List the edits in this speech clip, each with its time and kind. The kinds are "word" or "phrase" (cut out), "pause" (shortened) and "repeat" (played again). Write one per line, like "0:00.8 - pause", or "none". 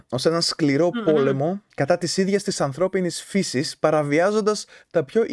0:01.7 - pause